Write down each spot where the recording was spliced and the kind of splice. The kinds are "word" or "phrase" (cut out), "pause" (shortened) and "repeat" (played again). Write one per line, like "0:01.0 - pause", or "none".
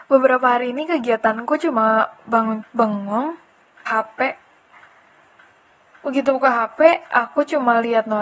0:02.6 - word
0:03.9 - word